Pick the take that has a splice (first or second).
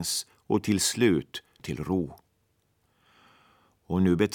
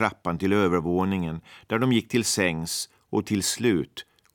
first